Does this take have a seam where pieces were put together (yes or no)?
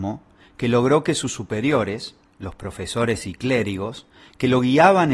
no